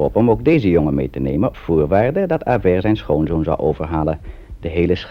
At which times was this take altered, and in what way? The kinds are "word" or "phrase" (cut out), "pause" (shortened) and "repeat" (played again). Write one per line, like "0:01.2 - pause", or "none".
0:01.5 - word